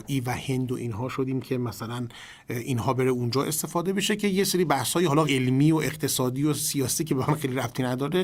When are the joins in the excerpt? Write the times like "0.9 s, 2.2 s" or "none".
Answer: 5.3 s